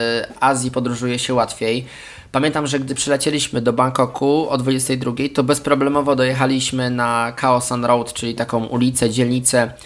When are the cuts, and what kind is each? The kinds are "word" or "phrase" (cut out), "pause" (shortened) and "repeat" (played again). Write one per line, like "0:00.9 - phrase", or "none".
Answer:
none